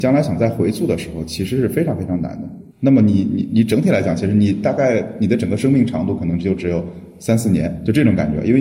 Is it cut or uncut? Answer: cut